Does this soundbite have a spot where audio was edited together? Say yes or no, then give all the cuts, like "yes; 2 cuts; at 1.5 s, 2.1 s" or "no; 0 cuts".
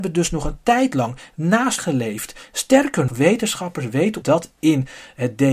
yes; 3 cuts; at 1.8 s, 3.1 s, 4.2 s